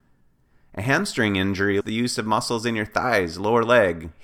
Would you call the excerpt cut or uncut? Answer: cut